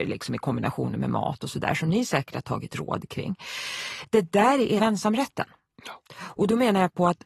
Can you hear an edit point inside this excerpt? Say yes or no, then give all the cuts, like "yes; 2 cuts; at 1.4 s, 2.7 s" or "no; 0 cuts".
yes; 1 cut; at 4.8 s